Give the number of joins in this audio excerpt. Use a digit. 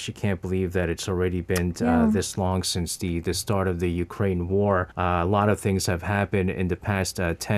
1